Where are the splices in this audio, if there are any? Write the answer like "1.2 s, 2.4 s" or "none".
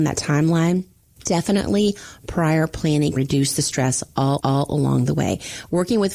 3.2 s, 4.4 s